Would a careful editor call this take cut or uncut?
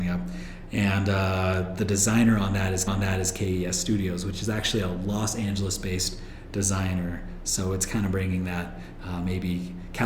cut